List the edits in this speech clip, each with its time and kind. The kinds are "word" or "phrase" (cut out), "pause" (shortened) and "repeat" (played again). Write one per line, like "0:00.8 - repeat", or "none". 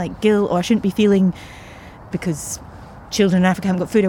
0:02.1 - word